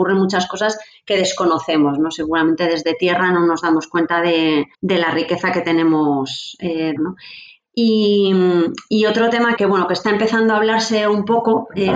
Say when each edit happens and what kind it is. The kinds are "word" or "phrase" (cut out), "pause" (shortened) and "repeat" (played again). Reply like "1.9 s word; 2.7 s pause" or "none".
4.7 s pause; 7.0 s phrase; 9.6 s word

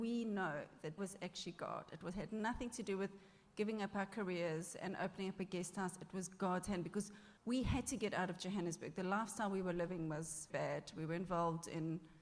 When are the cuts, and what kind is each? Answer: 1.0 s word; 7.4 s pause; 10.5 s word

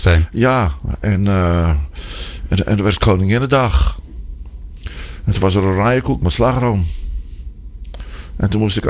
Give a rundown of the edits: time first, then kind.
none

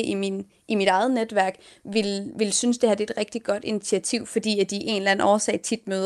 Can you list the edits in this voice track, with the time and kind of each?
none

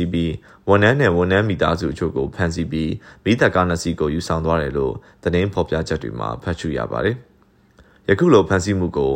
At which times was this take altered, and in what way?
none

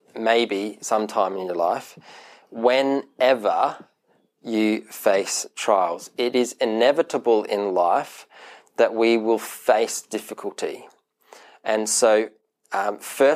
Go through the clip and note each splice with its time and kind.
none

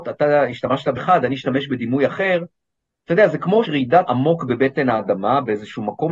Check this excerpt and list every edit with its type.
1.0 s word; 3.7 s word; 4.1 s word

